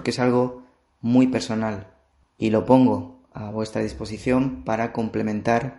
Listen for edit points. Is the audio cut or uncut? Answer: uncut